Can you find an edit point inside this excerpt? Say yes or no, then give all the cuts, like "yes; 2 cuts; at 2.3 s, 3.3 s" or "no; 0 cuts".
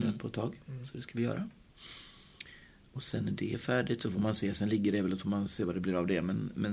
no; 0 cuts